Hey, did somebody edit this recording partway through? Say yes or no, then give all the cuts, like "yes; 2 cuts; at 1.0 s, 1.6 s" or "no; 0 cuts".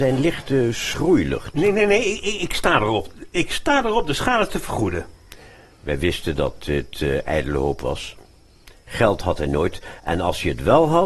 no; 0 cuts